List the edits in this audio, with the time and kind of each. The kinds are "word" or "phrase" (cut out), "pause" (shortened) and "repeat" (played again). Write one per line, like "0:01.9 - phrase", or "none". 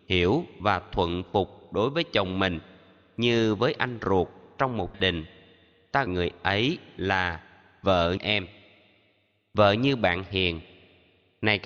0:04.9 - word
0:06.1 - word
0:08.2 - word

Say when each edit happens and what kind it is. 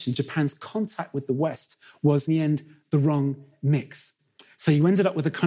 0:02.3 - word

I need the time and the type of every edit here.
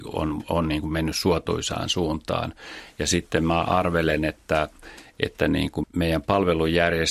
0:05.8 - word

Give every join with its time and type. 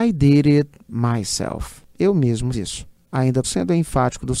0:02.5 - word
0:03.4 - word

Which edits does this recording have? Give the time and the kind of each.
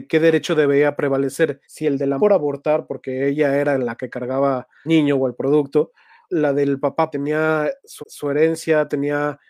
0:01.6 - pause
0:02.2 - word
0:04.9 - word
0:06.3 - word
0:07.1 - word
0:08.0 - repeat

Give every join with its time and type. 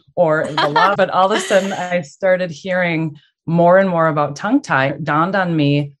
0:01.0 - phrase
0:04.9 - word

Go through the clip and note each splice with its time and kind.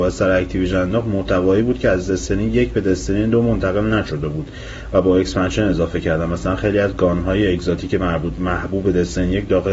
none

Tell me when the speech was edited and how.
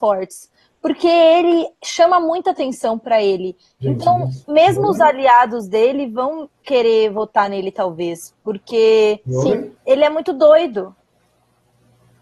0:04.4 - pause
0:09.8 - pause

